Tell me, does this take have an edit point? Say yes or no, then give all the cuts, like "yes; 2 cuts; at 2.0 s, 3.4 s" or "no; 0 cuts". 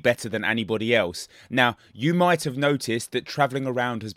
no; 0 cuts